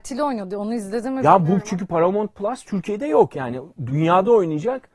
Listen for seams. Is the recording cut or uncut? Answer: uncut